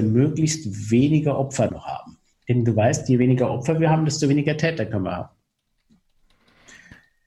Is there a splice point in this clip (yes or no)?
yes